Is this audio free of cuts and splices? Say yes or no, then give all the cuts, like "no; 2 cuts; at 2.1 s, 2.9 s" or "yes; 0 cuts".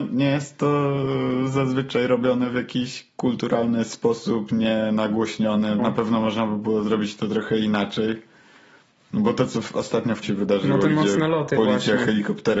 no; 2 cuts; at 5.8 s, 10.2 s